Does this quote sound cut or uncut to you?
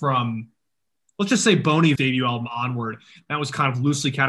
cut